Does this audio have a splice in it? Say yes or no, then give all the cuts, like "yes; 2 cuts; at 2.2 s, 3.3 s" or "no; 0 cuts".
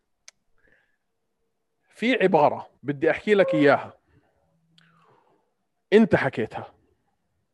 yes; 1 cut; at 2.8 s